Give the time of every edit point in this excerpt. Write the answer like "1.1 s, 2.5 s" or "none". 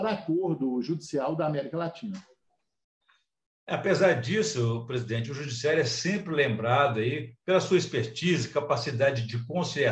none